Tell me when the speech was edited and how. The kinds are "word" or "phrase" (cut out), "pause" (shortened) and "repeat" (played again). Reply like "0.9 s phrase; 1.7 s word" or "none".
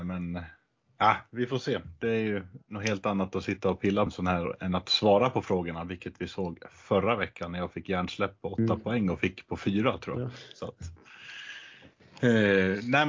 4.1 s word